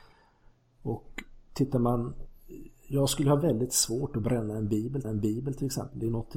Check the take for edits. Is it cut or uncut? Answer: cut